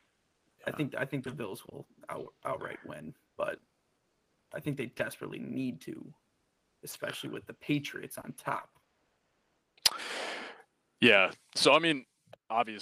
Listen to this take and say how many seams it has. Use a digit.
0